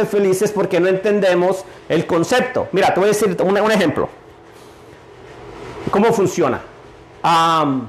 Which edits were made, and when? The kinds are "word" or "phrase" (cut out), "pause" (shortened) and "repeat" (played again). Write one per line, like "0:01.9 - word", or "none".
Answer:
none